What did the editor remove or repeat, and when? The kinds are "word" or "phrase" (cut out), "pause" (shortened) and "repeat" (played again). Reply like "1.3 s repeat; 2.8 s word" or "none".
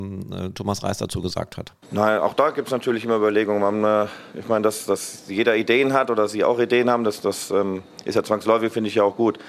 1.8 s pause; 7.2 s word